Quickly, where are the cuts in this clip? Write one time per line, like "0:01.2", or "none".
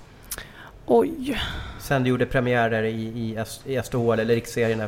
none